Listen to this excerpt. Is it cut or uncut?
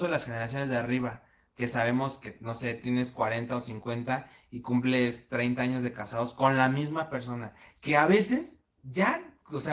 uncut